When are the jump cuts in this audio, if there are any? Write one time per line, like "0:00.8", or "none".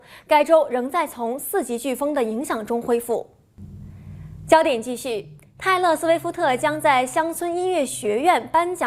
none